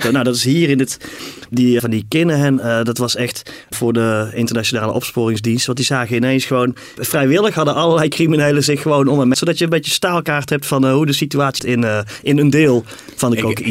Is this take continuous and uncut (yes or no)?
no